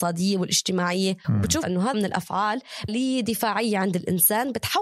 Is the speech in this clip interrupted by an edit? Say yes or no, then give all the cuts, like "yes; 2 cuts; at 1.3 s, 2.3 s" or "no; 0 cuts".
yes; 4 cuts; at 1.2 s, 1.6 s, 1.9 s, 2.9 s